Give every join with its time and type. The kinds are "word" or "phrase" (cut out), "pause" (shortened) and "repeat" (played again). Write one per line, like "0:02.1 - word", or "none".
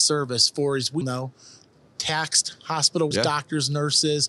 0:01.0 - word
0:03.1 - word